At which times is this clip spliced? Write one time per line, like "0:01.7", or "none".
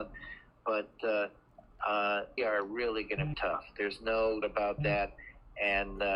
0:02.4
0:03.3
0:04.4